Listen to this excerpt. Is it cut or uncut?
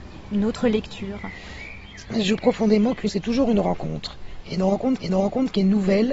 cut